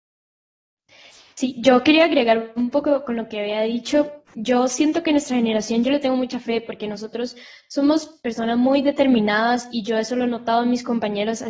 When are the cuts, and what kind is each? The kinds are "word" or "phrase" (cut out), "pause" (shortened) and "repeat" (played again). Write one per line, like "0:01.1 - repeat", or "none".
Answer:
none